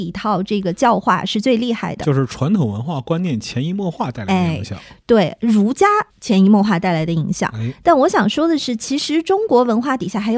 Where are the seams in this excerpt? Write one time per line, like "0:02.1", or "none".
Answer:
0:06.1